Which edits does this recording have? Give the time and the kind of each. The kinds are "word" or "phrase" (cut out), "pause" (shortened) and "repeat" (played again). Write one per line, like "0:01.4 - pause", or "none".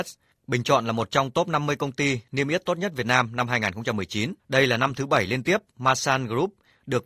0:04.4 - pause